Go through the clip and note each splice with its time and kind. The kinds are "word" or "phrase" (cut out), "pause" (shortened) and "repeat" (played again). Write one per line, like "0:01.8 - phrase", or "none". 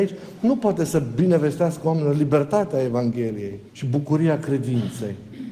0:03.7 - pause